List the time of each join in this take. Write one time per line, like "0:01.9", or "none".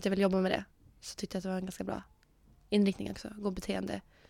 none